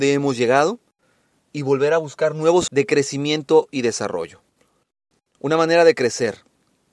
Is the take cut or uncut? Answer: cut